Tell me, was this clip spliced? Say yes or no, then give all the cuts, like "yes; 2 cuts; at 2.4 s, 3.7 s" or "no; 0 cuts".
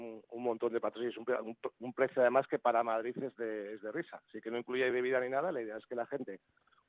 no; 0 cuts